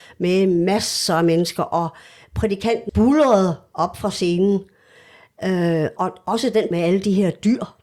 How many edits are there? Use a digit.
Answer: 3